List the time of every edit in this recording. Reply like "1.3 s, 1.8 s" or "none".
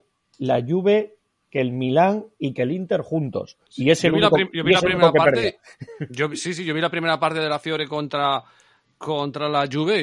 3.7 s